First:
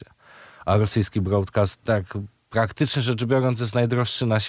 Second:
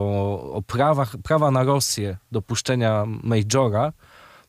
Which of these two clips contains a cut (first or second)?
first